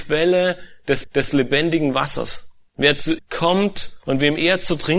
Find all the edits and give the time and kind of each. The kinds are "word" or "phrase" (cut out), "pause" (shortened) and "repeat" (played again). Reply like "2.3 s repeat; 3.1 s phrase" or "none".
1.0 s repeat; 2.7 s pause; 3.2 s word